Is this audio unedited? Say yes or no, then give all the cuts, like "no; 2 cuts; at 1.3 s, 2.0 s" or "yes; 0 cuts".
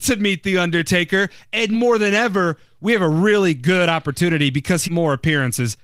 no; 2 cuts; at 1.7 s, 4.8 s